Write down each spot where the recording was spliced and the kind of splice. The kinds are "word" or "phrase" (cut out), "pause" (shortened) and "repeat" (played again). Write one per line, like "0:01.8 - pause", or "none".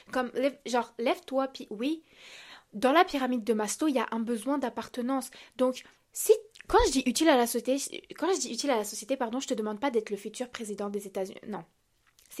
0:05.9 - pause